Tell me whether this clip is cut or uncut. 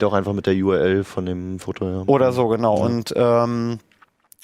uncut